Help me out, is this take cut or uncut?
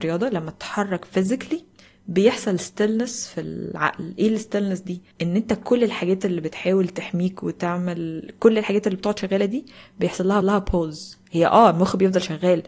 cut